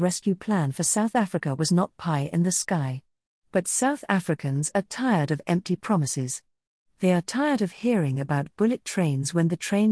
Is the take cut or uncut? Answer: uncut